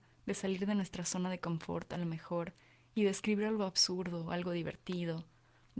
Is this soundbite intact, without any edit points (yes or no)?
yes